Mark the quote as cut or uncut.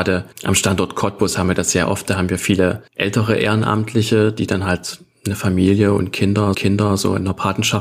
cut